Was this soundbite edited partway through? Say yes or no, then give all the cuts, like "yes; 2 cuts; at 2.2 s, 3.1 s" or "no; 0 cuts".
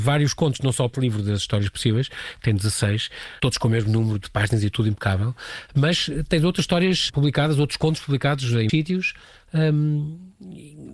yes; 5 cuts; at 0.9 s, 3.4 s, 4.7 s, 7.1 s, 8.7 s